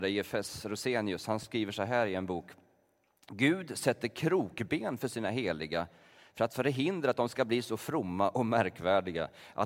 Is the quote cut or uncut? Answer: uncut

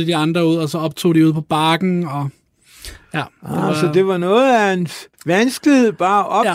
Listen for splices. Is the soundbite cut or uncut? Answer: cut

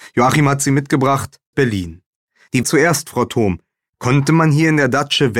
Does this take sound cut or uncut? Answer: cut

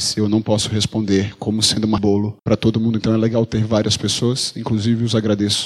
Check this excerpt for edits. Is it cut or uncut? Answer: cut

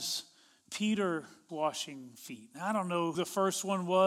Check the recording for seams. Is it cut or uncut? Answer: cut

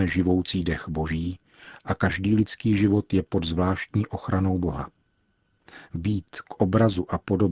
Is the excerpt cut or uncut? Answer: uncut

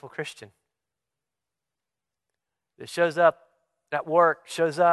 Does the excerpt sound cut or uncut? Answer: uncut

